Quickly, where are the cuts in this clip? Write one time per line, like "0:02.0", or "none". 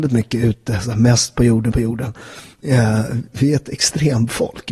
0:01.7